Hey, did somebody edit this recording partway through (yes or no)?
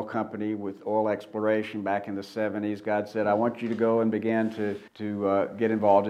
yes